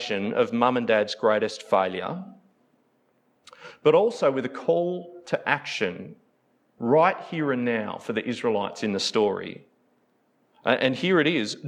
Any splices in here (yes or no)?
no